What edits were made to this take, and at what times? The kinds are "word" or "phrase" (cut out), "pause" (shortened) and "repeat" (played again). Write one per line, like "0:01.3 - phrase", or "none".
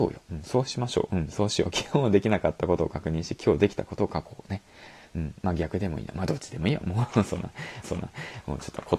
0:07.8 - repeat